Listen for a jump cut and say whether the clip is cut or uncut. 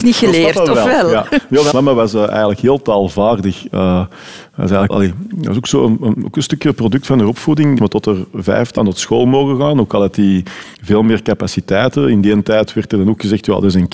cut